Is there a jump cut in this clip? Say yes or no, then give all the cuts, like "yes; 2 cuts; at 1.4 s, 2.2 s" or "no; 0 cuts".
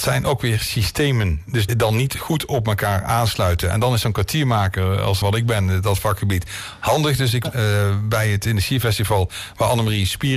yes; 3 cuts; at 1.7 s, 5.2 s, 7.4 s